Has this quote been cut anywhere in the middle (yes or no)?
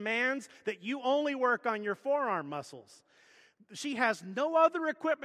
no